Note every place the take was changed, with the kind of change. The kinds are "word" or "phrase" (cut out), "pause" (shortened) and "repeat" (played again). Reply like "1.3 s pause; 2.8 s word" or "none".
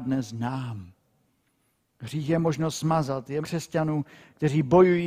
3.4 s word